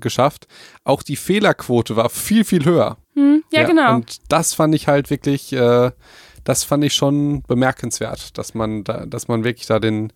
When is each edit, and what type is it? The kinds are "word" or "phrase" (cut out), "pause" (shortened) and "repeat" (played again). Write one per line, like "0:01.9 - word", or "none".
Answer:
0:03.0 - pause